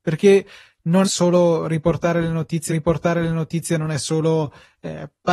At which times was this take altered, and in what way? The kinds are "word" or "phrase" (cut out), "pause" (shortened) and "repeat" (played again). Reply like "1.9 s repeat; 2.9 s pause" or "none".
1.0 s word; 2.7 s repeat